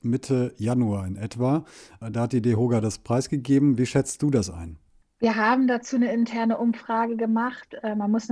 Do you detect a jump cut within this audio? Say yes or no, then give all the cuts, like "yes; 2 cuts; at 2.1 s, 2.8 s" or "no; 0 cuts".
no; 0 cuts